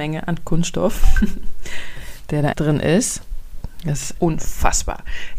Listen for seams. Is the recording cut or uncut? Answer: cut